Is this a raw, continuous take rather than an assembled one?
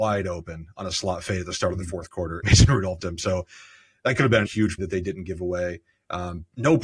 no; 4 cuts; at 2.4 s, 3.0 s, 4.4 s, 4.8 s

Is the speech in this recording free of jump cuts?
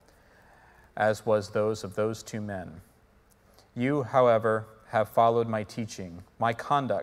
yes; 0 cuts

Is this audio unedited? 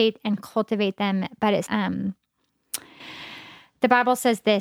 no; 1 cut; at 1.7 s

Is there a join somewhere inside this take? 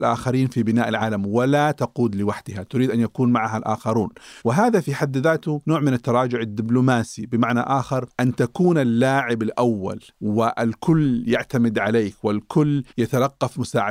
yes; 3 cuts; at 4.4 s, 10.1 s, 12.9 s

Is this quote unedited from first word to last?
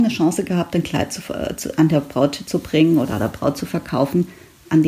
yes; 0 cuts

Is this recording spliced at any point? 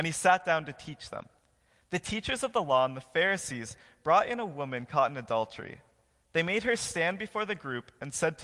no; 0 cuts

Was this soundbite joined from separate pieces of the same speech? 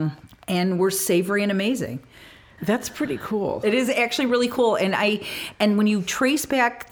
no; 0 cuts

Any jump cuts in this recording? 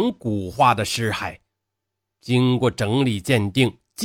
no; 0 cuts

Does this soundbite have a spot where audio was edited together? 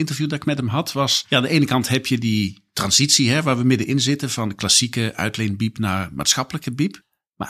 no; 0 cuts

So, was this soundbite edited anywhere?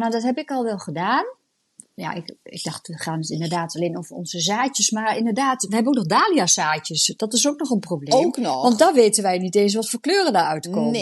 no; 0 cuts

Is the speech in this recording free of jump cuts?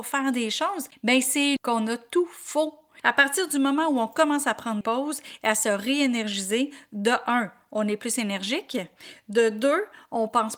no; 2 cuts; at 1.6 s, 4.8 s

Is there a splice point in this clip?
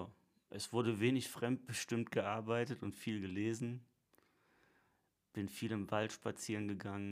no; 0 cuts

